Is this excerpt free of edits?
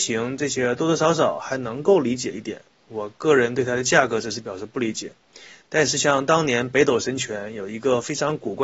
yes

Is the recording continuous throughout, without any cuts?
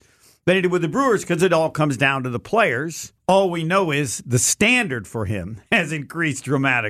no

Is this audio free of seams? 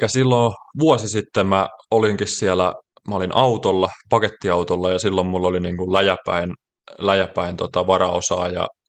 yes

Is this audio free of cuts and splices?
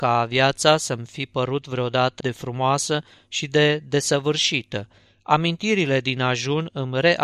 no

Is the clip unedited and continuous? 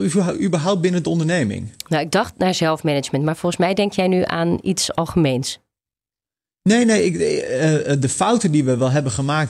yes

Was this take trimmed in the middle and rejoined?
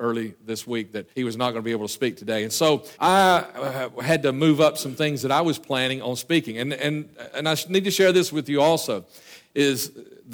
yes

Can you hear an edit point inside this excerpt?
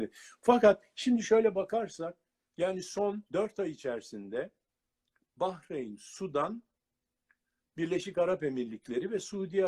yes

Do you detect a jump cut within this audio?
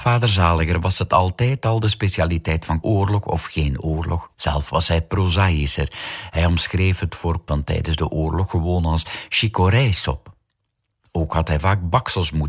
yes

